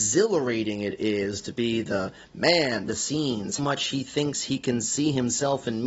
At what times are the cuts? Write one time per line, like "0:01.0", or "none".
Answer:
0:02.9
0:03.6